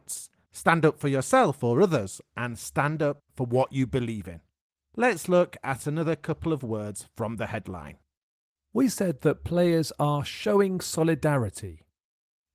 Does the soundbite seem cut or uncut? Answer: uncut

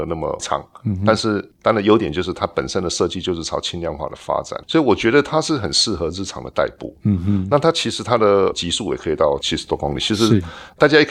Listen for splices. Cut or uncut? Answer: cut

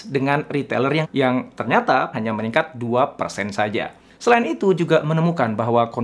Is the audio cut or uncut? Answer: cut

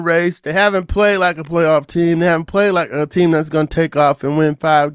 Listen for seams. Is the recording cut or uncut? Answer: uncut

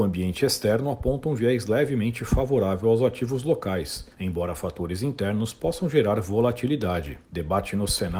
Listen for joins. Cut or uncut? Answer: cut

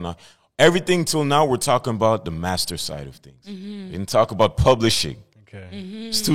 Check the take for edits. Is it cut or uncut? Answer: uncut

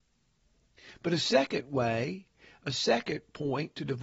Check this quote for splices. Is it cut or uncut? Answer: uncut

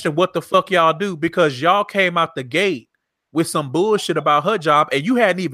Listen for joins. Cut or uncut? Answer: uncut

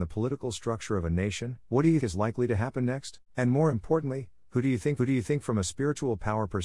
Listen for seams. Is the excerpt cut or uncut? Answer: cut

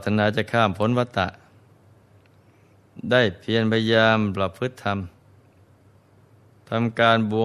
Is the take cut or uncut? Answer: uncut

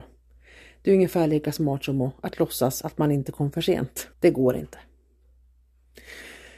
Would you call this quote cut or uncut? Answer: cut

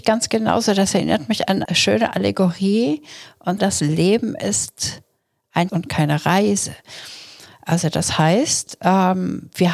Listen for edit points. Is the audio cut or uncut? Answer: cut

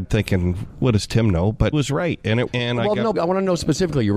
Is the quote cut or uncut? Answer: cut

